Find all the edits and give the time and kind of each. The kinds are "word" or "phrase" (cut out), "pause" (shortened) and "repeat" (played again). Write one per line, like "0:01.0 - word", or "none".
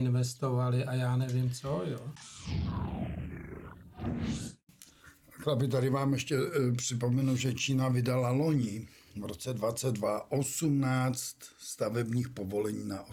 none

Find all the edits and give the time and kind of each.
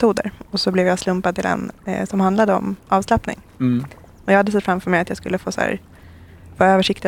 0:02.8 - pause

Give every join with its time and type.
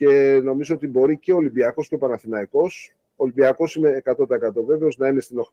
none

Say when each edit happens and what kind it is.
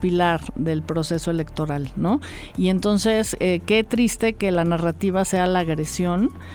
none

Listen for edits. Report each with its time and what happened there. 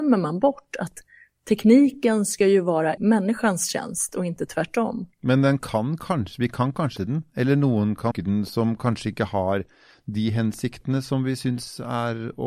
0:03.0 - word
0:07.0 - word
0:08.1 - word

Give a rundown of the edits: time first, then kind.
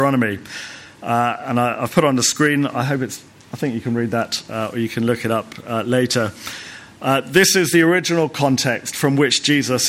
none

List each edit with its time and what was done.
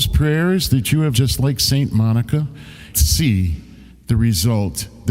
0:01.1 - word
0:02.9 - phrase
0:03.9 - pause

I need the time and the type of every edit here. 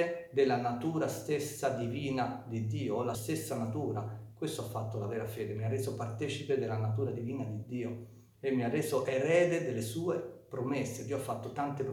0:03.1 - word

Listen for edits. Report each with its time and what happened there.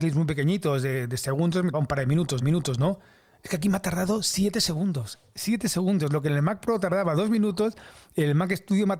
0:01.7 - word
0:02.4 - repeat

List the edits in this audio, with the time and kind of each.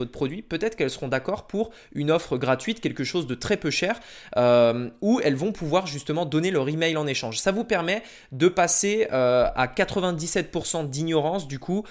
none

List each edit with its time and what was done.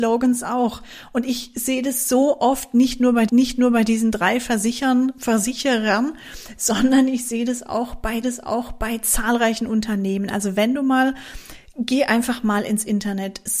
0:03.3 - repeat
0:08.2 - repeat

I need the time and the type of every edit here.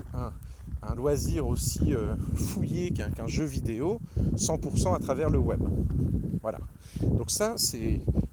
none

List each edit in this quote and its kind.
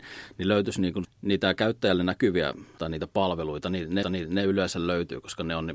0:01.0 - word
0:02.8 - word
0:04.0 - repeat

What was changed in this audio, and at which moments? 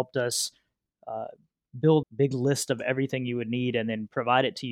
0:02.0 - phrase

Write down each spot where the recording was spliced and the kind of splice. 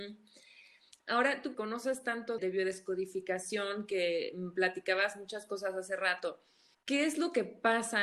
0:01.5 - word
0:02.4 - word
0:06.7 - pause

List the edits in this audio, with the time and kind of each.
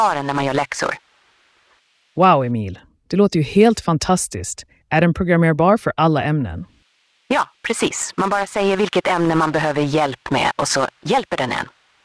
none

